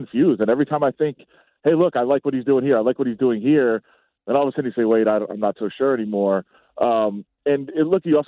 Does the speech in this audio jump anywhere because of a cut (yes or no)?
no